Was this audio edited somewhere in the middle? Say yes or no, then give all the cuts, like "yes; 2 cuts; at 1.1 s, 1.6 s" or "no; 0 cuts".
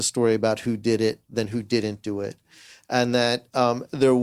no; 0 cuts